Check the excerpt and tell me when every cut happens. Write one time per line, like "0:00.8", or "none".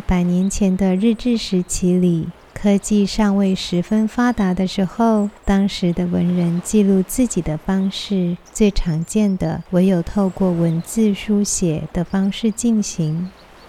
0:02.4
0:05.4
0:08.5
0:09.7